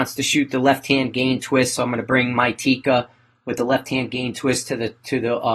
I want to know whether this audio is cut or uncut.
uncut